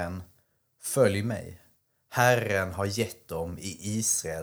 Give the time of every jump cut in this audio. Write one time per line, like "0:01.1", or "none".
none